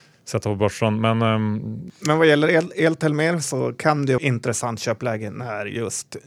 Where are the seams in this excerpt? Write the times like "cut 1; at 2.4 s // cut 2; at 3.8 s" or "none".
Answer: cut 1; at 4.2 s